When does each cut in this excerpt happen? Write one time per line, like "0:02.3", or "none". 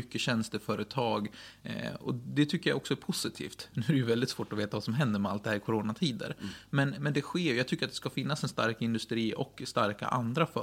none